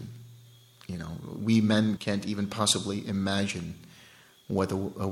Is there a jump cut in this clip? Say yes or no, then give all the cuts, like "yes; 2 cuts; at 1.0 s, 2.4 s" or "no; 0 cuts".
yes; 1 cut; at 2.0 s